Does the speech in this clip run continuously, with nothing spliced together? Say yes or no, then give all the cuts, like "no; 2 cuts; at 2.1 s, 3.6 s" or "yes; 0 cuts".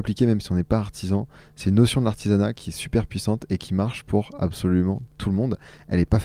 yes; 0 cuts